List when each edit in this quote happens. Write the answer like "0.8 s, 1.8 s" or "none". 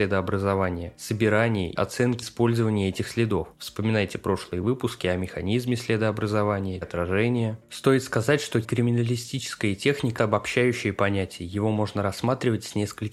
1.8 s, 2.2 s, 6.8 s, 8.6 s, 10.2 s